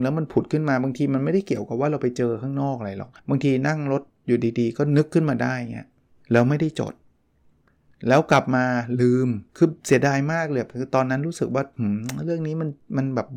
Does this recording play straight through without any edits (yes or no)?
no